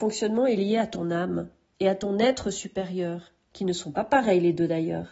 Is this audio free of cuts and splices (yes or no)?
yes